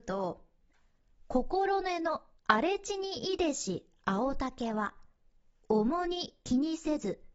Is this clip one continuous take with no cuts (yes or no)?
no